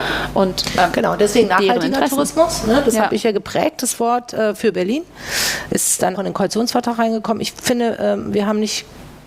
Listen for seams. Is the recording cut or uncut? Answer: cut